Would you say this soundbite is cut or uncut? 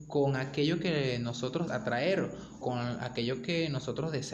cut